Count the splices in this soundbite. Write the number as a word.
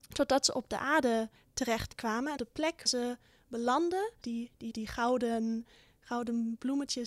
five